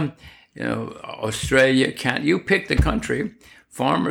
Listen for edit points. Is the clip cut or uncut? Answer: uncut